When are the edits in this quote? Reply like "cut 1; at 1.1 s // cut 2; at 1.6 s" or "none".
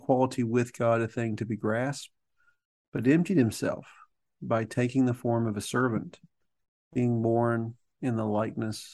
none